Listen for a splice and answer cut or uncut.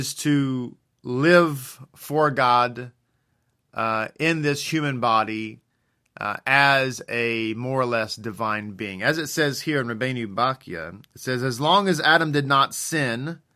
uncut